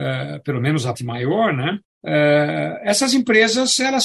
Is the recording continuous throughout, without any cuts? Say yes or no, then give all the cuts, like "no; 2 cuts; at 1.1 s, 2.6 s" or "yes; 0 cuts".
no; 2 cuts; at 0.9 s, 1.8 s